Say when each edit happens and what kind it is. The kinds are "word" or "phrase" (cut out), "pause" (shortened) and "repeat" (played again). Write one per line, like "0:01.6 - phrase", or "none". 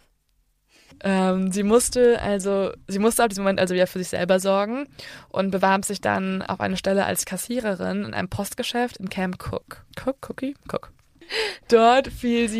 0:09.9 - pause